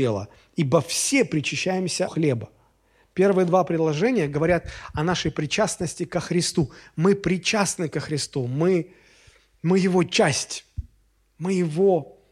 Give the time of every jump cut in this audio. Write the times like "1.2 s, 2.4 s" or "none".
2.1 s